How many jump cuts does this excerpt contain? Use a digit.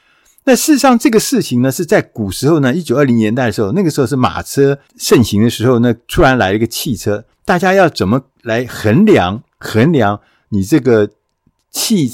3